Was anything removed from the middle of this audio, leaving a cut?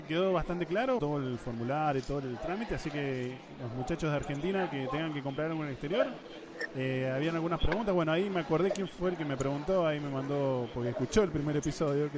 yes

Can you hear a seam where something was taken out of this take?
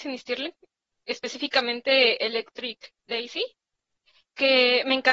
yes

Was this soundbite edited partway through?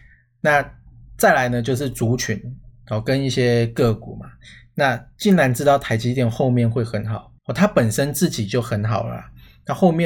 yes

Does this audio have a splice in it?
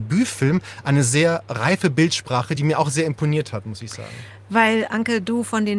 no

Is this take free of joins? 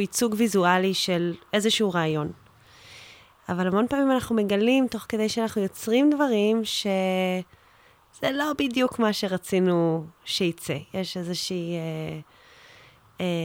yes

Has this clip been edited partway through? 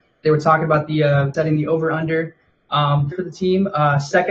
yes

